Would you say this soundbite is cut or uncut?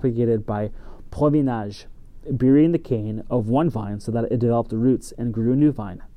uncut